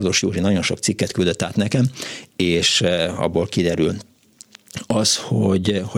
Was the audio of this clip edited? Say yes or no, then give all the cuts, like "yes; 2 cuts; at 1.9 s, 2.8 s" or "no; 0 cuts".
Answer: no; 0 cuts